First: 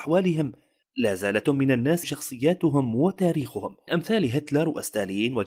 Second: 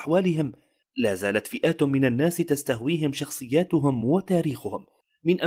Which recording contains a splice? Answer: first; 3 cuts; at 1.4 s, 2.0 s, 3.9 s

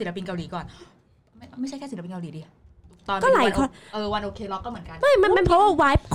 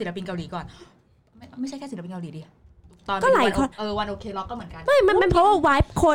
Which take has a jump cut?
second; 1 cut; at 3.7 s

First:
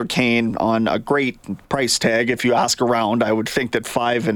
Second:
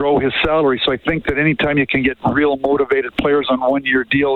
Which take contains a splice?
first; 1 cut; at 1.6 s

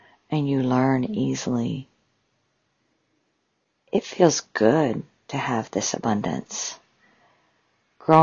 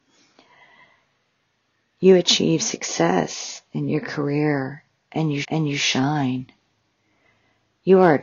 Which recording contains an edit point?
second; 1 cut; at 5.4 s

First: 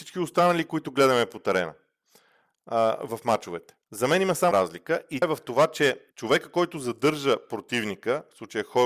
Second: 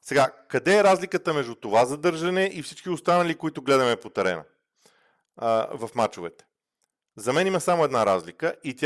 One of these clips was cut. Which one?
first; 4 cuts; at 3.8 s, 4.5 s, 5.2 s, 6.1 s

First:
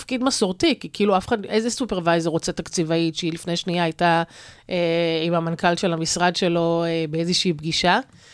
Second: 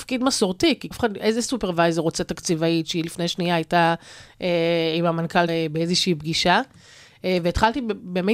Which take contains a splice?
second; 2 cuts; at 0.9 s, 5.5 s

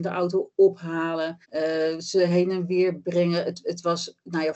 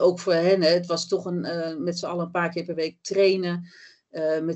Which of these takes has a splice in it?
first; 1 cut; at 1.4 s

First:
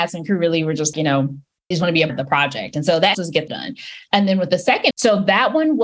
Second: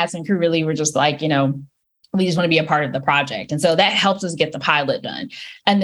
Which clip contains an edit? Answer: first; 6 cuts; at 0.9 s, 1.7 s, 2.1 s, 3.1 s, 3.5 s, 4.9 s

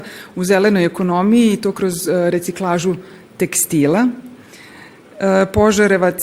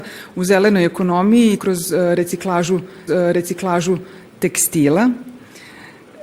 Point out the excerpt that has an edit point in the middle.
second; 2 cuts; at 1.6 s, 3.1 s

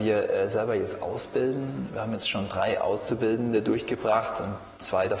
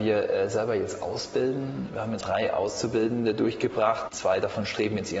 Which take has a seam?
second; 2 cuts; at 2.2 s, 4.1 s

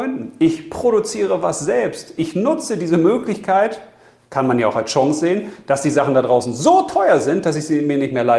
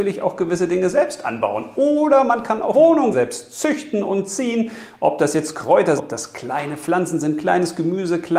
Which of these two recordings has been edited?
second; 3 cuts; at 2.7 s, 3.1 s, 6.0 s

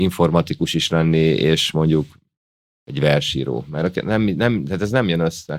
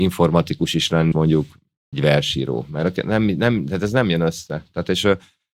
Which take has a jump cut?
second; 2 cuts; at 1.1 s, 1.9 s

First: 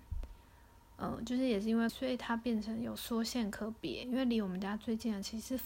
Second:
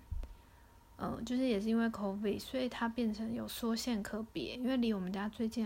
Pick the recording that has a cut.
first; 1 cut; at 1.9 s

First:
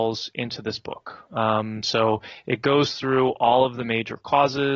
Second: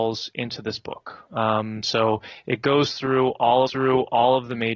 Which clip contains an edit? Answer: second; 1 cut; at 3.7 s

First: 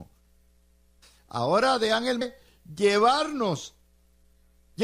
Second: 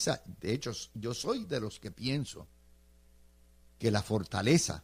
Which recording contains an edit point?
first; 1 cut; at 2.2 s

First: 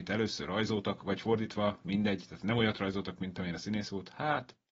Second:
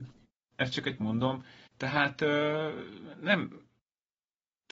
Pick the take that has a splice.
second; 1 cut; at 1.0 s

